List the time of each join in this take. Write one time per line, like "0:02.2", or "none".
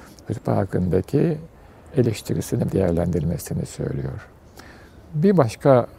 0:02.7

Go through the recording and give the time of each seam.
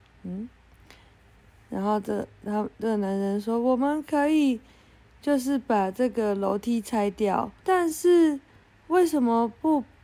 0:07.6

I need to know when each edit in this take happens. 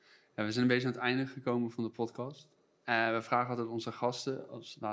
none

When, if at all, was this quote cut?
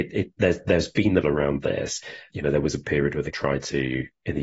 0:01.2
0:02.3
0:02.8
0:03.3

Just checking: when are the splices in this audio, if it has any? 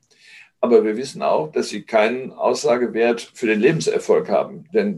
none

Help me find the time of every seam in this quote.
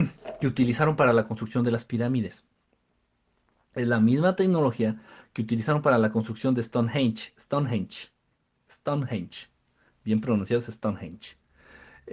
none

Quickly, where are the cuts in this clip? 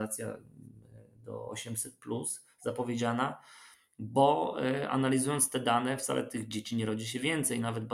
none

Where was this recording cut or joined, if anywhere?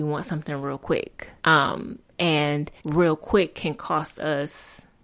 0:01.4
0:02.8

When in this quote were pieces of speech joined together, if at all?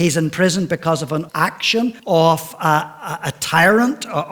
0:01.3
0:02.0

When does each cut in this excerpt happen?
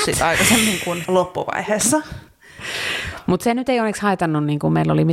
0:01.0

